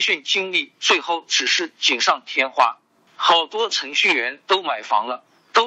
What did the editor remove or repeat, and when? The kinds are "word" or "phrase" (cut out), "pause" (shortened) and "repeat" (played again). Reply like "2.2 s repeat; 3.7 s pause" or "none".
none